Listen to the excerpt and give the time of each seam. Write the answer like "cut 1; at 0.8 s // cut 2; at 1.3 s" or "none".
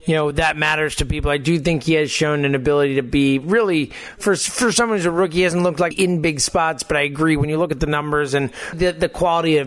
cut 1; at 5.9 s // cut 2; at 8.7 s